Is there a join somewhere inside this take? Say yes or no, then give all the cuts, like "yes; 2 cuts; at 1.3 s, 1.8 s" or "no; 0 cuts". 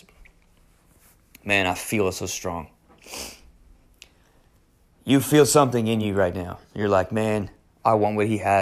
no; 0 cuts